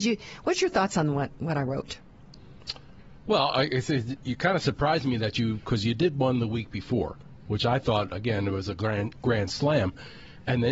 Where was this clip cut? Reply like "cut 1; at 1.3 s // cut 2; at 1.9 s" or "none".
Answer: cut 1; at 4.2 s